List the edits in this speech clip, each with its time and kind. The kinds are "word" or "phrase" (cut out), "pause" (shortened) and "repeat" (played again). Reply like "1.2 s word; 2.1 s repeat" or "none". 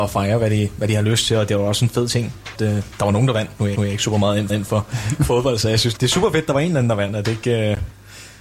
2.5 s word; 3.7 s repeat; 4.5 s repeat; 6.0 s word